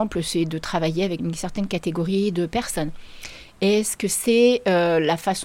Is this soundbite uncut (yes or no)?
no